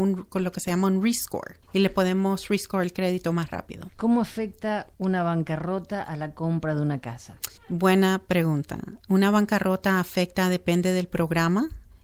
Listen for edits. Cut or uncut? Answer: cut